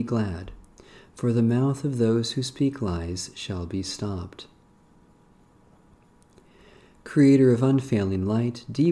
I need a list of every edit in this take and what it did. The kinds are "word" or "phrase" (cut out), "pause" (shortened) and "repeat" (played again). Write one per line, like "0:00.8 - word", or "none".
none